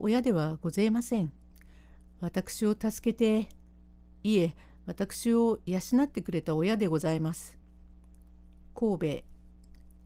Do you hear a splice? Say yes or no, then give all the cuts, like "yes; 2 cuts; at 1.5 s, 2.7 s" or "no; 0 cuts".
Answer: no; 0 cuts